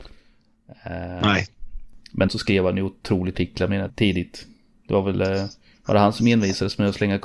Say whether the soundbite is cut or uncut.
cut